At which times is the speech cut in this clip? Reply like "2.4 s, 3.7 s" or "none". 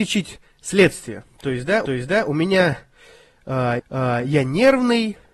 1.9 s, 3.8 s

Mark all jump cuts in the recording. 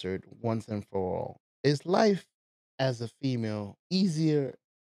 2.4 s, 3.8 s

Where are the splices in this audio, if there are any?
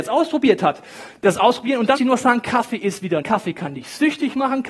2.0 s, 3.2 s

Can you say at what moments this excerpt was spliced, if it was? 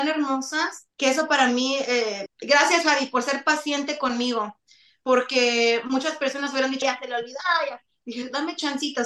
0.9 s, 2.3 s, 6.8 s

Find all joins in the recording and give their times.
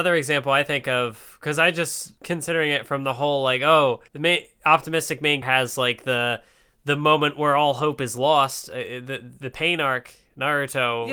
2.2 s, 4.1 s, 5.4 s

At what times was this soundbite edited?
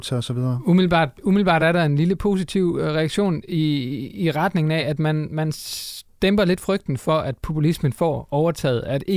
none

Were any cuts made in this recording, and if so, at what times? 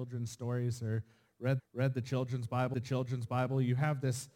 1.6 s, 2.7 s

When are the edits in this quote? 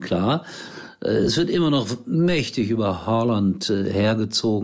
none

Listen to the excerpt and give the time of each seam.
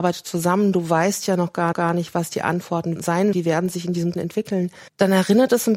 1.7 s, 3.0 s, 3.3 s, 4.1 s, 4.9 s

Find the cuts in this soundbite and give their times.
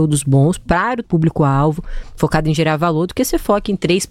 1.0 s

